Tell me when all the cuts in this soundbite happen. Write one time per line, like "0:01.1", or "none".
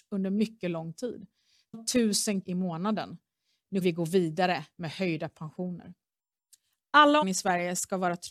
0:01.7
0:02.4
0:03.8
0:07.2